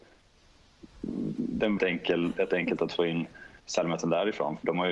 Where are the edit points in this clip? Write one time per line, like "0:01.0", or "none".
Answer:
0:01.8
0:02.8
0:03.6